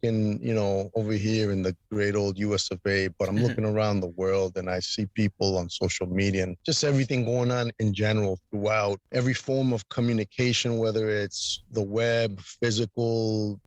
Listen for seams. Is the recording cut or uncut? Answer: uncut